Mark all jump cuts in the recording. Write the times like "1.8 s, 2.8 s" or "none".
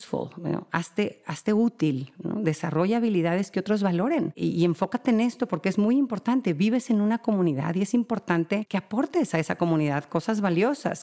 none